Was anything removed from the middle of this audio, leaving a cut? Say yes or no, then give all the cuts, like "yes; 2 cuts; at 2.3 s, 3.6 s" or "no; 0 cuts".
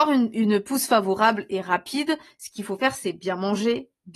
no; 0 cuts